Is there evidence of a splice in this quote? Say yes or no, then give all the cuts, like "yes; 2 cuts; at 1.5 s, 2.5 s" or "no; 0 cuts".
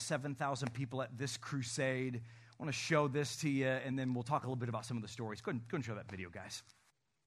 no; 0 cuts